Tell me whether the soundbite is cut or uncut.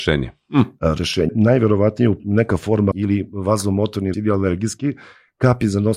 cut